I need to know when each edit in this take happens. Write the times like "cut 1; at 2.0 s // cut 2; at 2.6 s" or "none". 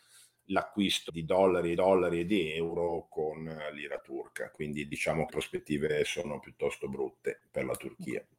cut 1; at 1.1 s // cut 2; at 1.8 s // cut 3; at 5.3 s